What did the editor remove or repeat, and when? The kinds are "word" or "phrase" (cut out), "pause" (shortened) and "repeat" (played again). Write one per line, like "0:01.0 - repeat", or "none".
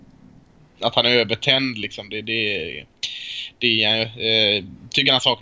none

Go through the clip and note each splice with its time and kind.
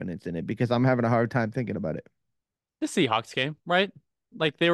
none

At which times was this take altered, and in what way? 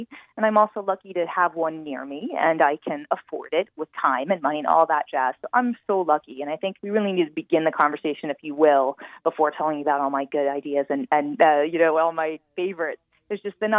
0:06.8 - pause

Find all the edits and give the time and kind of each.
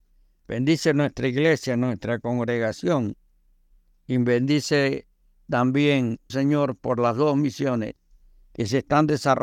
0:06.3 - word

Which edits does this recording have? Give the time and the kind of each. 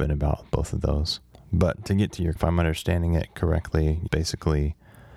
0:02.4 - word
0:04.1 - word

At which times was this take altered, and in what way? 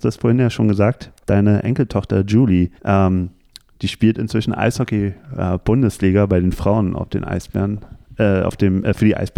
0:02.8 - pause

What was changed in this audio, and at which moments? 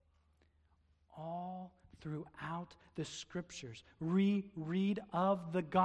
none

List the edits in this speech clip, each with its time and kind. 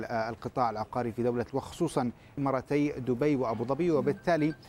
0:01.5 - word
0:02.4 - word

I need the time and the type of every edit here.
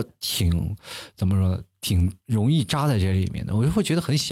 0:02.2 - pause

